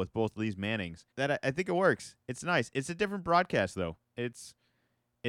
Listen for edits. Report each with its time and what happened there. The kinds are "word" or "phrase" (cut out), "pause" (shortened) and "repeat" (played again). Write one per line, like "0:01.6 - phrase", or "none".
0:01.1 - pause